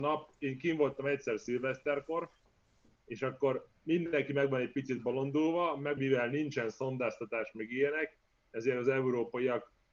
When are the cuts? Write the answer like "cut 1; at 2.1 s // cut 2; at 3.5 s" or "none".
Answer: cut 1; at 6.0 s